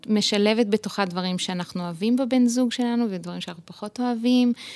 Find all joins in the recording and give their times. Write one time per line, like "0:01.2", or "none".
none